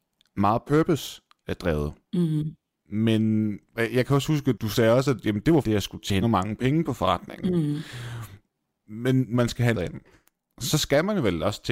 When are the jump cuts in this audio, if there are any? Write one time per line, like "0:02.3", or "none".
0:03.7
0:05.6
0:06.2
0:09.3
0:09.7

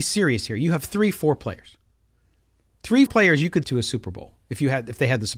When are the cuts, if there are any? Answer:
0:03.1
0:03.6

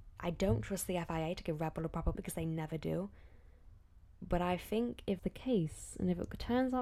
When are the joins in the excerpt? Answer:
0:02.1
0:05.2

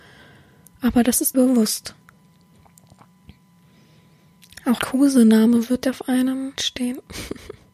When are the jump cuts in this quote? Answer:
0:01.3
0:04.8
0:05.8
0:06.6

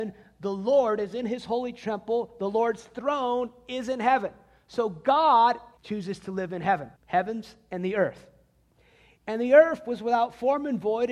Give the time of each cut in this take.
0:05.8
0:07.0

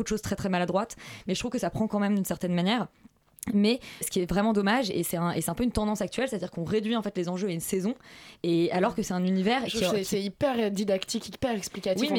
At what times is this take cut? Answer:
0:04.0

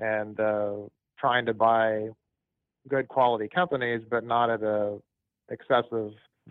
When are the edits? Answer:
none

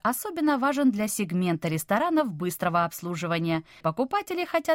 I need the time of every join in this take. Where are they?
0:03.8

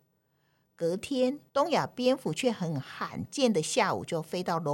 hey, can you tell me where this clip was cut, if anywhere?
0:01.5

